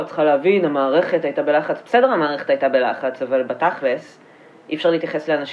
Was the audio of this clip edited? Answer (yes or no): no